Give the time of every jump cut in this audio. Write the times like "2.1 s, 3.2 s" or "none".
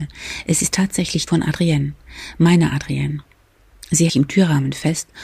1.3 s, 4.1 s